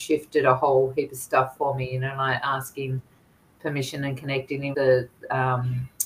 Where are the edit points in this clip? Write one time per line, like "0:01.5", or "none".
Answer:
0:04.7